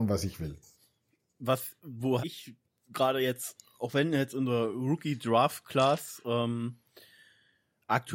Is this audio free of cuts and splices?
no; 1 cut; at 2.2 s

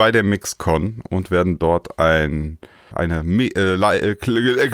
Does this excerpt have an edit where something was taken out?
yes; 1 cut; at 2.9 s

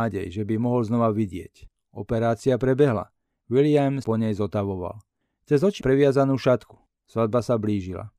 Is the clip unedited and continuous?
no; 2 cuts; at 4.0 s, 5.8 s

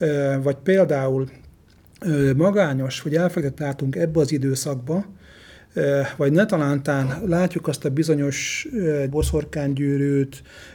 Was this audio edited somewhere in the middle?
yes; 2 cuts; at 3.6 s, 9.1 s

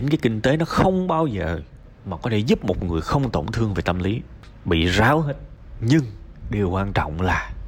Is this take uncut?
yes; 0 cuts

